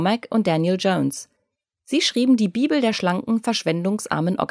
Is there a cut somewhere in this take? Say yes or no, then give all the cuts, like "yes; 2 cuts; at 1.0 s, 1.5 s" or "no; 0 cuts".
no; 0 cuts